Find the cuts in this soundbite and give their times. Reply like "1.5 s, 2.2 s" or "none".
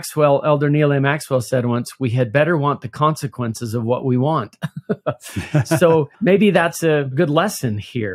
6.1 s

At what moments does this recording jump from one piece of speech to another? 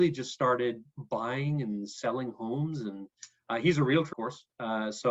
4.1 s

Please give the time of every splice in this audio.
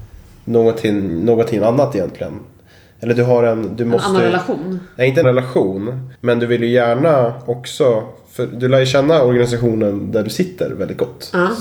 5.2 s, 6.1 s

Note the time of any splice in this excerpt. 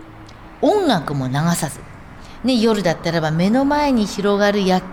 none

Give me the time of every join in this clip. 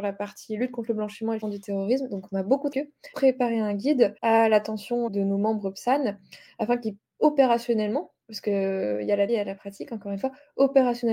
1.4 s, 2.7 s, 3.1 s, 4.2 s, 5.1 s, 7.0 s, 8.2 s, 9.3 s

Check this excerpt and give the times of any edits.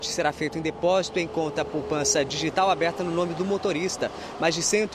none

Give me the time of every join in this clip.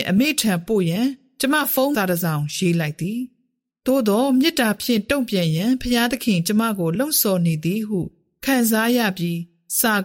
1.9 s

